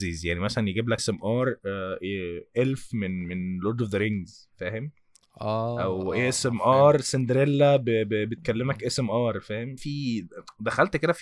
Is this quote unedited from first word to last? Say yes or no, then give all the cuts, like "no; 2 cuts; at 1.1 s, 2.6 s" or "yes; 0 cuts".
no; 2 cuts; at 1.0 s, 9.8 s